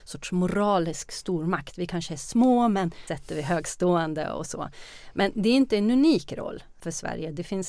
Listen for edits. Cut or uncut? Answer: cut